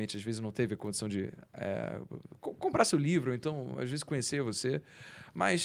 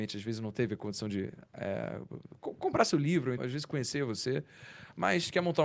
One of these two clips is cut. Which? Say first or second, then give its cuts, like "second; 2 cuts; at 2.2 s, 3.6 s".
second; 1 cut; at 3.4 s